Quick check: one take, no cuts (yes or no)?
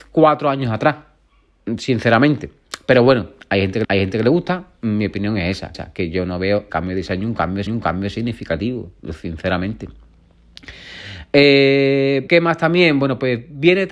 no